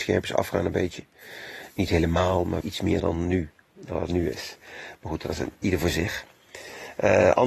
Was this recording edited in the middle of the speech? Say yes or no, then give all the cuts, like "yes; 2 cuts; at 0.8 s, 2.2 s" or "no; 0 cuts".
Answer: yes; 2 cuts; at 2.6 s, 3.0 s